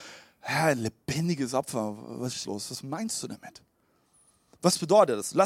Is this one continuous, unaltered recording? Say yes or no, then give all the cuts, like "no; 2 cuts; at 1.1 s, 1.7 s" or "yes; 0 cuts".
no; 1 cut; at 2.4 s